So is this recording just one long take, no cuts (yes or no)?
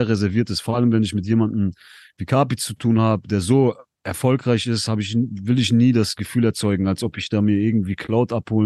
yes